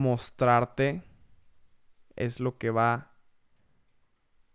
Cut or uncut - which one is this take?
uncut